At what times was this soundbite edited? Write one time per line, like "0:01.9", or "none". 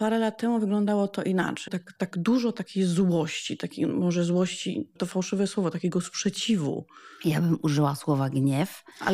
0:01.7
0:05.0